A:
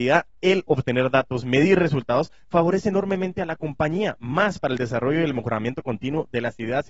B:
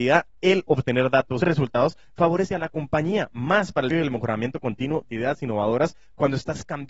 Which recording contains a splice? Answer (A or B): B